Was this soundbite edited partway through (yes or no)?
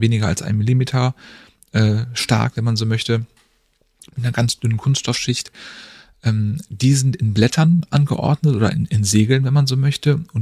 no